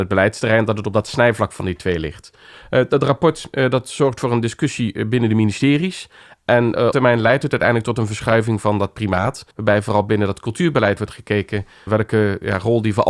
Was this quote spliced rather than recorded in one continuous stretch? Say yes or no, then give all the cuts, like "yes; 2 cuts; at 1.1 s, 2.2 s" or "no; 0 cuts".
yes; 3 cuts; at 6.9 s, 9.5 s, 11.9 s